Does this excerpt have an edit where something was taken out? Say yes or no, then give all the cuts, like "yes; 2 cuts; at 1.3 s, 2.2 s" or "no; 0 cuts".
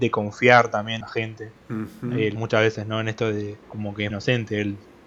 yes; 5 cuts; at 1.0 s, 1.6 s, 2.4 s, 3.6 s, 4.1 s